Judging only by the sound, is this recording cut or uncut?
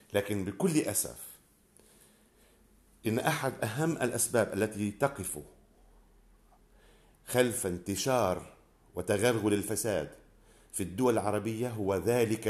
uncut